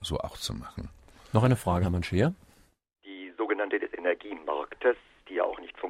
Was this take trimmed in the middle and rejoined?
yes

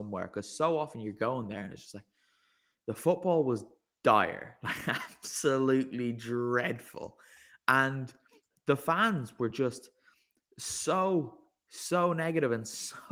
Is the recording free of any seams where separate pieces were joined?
yes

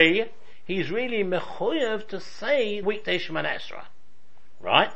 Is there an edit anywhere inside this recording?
yes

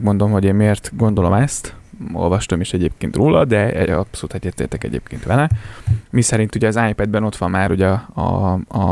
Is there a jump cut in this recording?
no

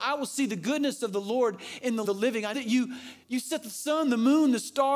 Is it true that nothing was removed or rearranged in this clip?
no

